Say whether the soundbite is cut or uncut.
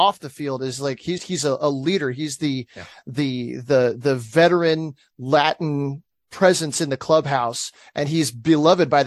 cut